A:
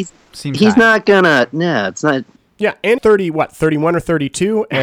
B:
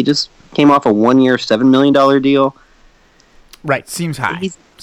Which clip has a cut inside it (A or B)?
A